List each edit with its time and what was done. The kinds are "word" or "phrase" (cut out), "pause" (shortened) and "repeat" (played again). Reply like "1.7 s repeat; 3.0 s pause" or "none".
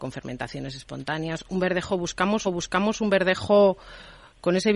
2.4 s repeat